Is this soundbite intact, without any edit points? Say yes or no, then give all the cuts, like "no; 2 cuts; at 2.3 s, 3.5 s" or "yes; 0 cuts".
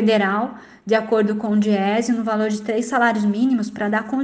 yes; 0 cuts